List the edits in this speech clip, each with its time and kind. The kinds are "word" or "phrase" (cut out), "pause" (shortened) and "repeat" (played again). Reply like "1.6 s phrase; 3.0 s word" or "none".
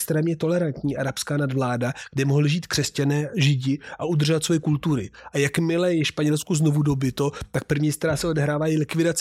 none